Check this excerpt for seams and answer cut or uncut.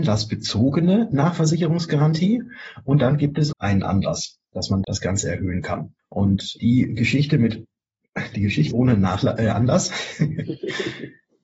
cut